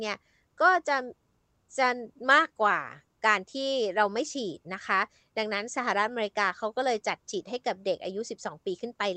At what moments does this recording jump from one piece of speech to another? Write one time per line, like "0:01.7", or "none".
none